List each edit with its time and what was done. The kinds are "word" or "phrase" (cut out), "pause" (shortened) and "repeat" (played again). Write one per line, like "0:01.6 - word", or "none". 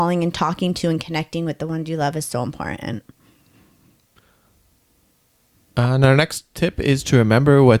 none

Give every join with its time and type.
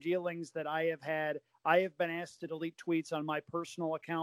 none

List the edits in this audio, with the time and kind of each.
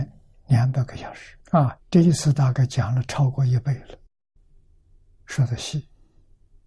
0:01.4 - pause

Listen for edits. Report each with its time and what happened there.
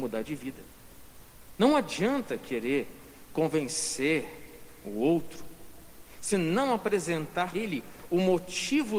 0:06.3 - word
0:07.5 - word

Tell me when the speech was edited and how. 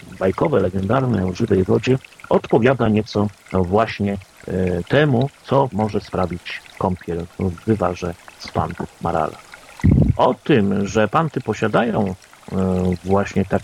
none

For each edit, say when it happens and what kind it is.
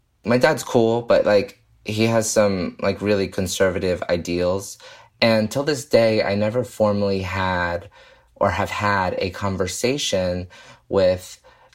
none

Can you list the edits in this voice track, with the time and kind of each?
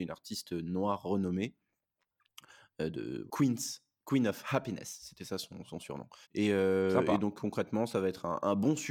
0:03.3 - phrase
0:06.2 - pause

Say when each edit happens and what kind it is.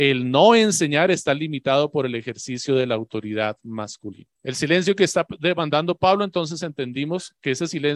0:04.3 - pause

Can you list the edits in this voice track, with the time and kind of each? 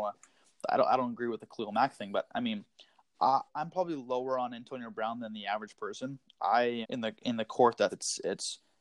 0:03.5 - word
0:06.8 - word
0:07.9 - word

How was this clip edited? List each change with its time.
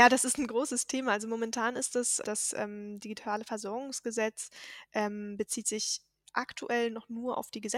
0:02.2 - word

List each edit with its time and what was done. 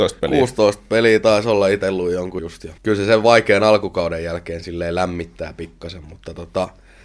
0:02.4 - word
0:02.8 - pause

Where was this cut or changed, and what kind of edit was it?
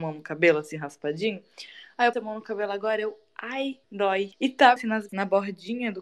0:02.1 - word
0:03.8 - pause
0:04.8 - word
0:05.1 - word

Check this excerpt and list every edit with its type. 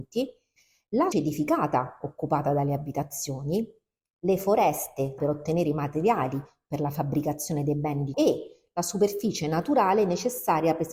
0:01.1 - word
0:05.2 - word
0:08.1 - word

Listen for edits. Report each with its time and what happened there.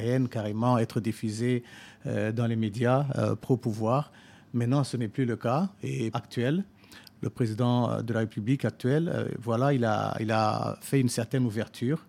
0:06.1 - phrase

